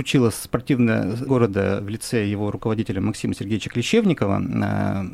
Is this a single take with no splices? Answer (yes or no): no